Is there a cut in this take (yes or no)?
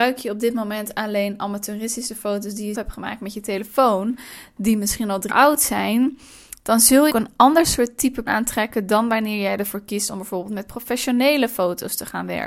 yes